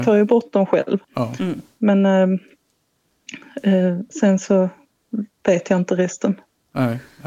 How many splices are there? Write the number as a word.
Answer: two